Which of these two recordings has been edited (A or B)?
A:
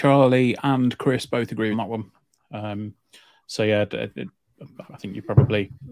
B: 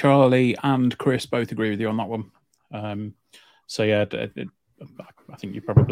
A